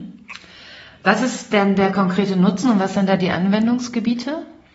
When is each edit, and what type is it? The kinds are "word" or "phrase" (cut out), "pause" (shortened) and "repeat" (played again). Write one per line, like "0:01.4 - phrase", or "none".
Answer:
none

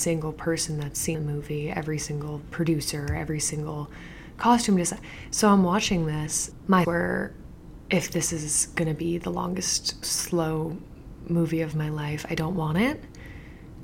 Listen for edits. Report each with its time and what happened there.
0:01.1 - word
0:06.8 - word
0:10.0 - word

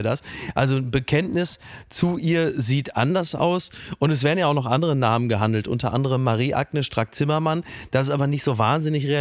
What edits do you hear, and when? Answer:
none

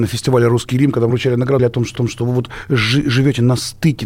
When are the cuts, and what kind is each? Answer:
0:01.1 - word
0:01.6 - phrase
0:01.9 - repeat

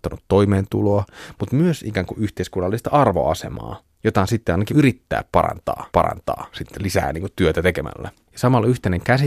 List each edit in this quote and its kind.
0:04.7 - word
0:05.9 - repeat

